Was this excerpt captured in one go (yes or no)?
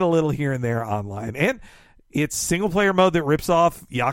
yes